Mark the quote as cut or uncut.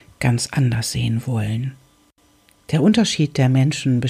uncut